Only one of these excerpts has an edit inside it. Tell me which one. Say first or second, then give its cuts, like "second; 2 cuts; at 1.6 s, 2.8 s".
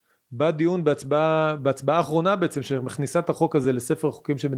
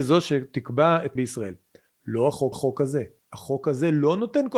second; 2 cuts; at 1.2 s, 2.5 s